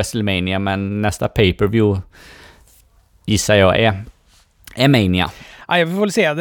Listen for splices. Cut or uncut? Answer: uncut